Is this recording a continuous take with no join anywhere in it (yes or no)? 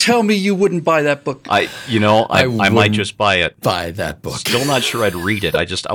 yes